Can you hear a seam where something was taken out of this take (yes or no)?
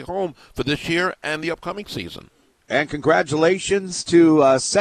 no